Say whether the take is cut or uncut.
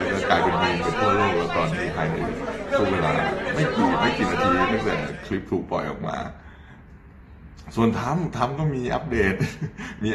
cut